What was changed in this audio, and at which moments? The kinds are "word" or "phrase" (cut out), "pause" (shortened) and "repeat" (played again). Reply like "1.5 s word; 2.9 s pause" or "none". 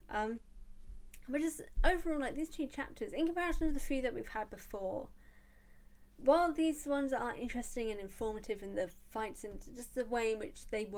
none

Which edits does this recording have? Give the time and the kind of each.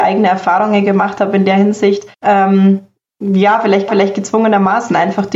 2.1 s pause; 3.9 s repeat

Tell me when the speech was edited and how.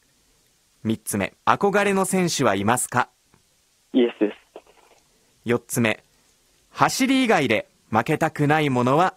1.4 s pause

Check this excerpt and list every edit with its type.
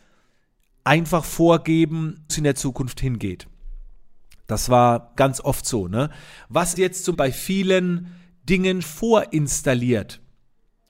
2.3 s word; 5.2 s word; 6.8 s word; 7.1 s word; 8.8 s word

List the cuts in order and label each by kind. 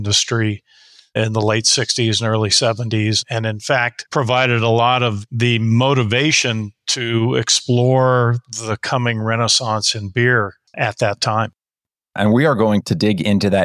none

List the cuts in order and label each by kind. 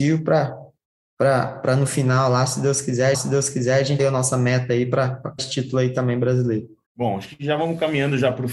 3.1 s repeat; 4.0 s word; 5.4 s word; 6.8 s pause

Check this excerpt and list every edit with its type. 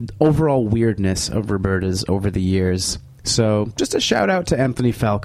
3.7 s word

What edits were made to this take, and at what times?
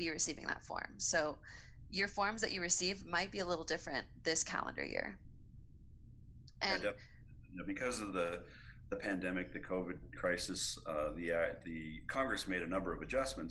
none

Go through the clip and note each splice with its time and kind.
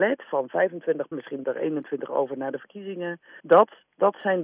1.1 s word; 1.4 s word; 3.4 s pause

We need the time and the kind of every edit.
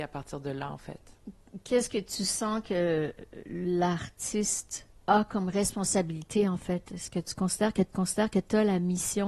7.9 s repeat

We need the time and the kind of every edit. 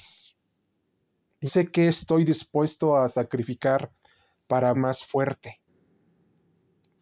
1.5 s word; 4.7 s word

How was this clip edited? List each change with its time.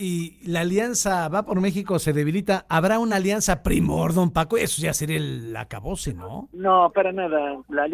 none

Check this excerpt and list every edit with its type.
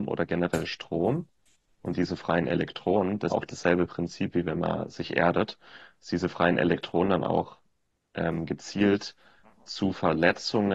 3.3 s word

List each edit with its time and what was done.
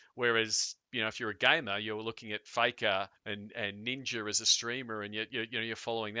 3.2 s pause

